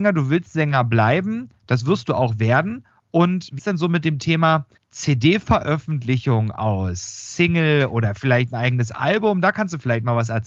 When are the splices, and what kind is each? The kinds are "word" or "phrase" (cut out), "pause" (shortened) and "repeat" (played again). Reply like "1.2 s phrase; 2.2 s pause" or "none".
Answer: 3.6 s word; 4.8 s word